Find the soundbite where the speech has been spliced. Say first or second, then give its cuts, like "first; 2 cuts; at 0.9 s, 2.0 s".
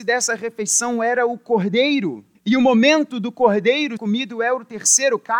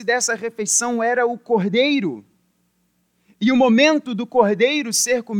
first; 2 cuts; at 2.3 s, 4.0 s